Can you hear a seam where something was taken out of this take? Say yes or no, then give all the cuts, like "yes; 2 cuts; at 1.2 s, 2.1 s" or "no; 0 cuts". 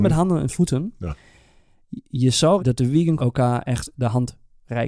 yes; 2 cuts; at 2.6 s, 3.2 s